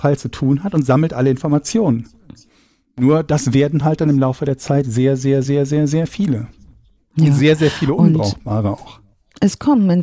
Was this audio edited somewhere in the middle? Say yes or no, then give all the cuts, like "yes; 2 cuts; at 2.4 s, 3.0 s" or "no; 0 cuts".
no; 0 cuts